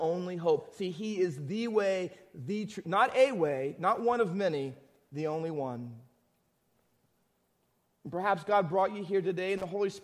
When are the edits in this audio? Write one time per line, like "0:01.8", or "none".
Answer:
none